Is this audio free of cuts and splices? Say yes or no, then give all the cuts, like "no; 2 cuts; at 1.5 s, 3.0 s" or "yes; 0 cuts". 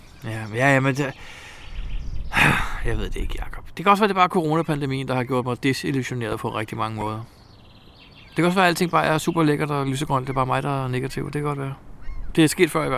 yes; 0 cuts